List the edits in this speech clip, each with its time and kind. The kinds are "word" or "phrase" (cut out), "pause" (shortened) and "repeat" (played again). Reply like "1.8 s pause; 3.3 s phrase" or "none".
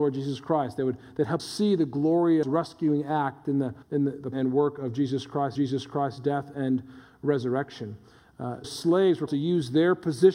1.4 s word; 2.4 s phrase; 3.8 s pause; 4.3 s word; 5.5 s repeat; 8.6 s word; 9.3 s word